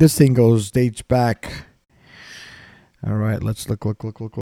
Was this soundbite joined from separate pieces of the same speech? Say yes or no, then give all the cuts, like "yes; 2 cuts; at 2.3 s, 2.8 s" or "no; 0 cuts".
no; 0 cuts